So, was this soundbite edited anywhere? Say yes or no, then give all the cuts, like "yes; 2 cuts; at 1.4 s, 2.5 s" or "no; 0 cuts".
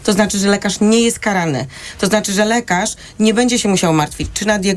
no; 0 cuts